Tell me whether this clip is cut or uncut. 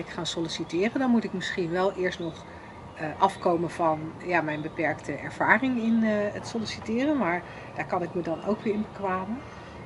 uncut